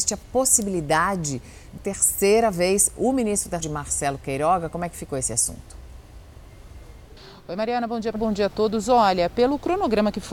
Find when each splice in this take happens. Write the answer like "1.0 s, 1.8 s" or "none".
1.8 s, 3.6 s, 7.2 s, 8.2 s